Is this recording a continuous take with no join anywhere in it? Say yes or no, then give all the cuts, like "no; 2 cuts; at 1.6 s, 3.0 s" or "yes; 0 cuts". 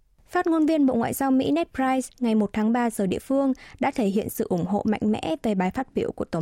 yes; 0 cuts